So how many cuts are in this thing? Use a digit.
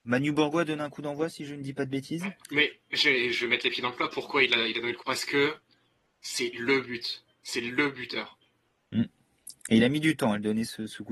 2